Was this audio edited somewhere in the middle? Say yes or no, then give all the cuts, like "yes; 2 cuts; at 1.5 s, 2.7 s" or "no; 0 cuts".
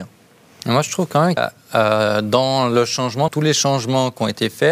yes; 2 cuts; at 1.4 s, 3.3 s